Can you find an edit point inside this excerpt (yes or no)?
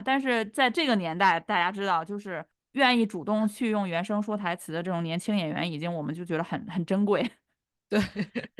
yes